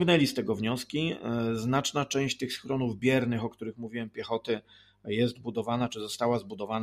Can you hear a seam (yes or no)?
no